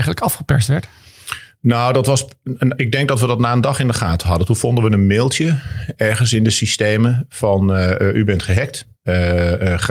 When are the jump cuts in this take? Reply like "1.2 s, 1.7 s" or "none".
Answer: 9.0 s